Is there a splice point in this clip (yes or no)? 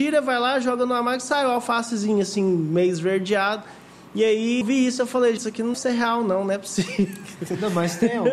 yes